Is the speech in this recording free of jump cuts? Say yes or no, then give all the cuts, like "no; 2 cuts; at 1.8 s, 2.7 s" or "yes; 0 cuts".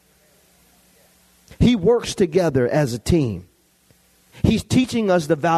yes; 0 cuts